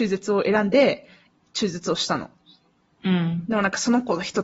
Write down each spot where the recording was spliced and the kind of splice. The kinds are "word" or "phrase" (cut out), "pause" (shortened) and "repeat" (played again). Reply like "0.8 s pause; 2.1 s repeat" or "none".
1.3 s pause